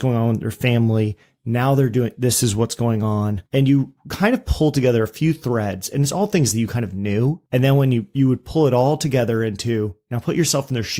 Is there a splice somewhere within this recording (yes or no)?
no